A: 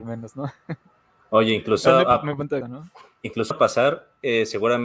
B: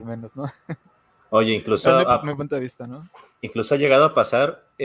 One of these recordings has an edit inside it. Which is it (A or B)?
A